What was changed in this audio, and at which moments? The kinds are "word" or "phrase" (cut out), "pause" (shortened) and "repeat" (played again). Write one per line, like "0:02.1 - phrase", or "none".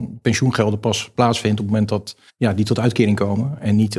0:02.3 - pause